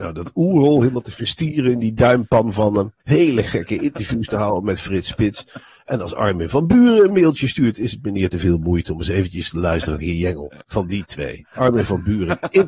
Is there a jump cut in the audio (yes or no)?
yes